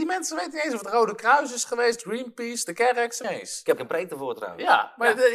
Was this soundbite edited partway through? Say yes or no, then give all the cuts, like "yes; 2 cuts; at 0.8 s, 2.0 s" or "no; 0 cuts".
yes; 2 cuts; at 3.2 s, 3.8 s